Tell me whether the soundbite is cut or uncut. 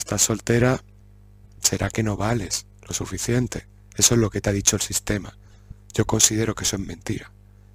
uncut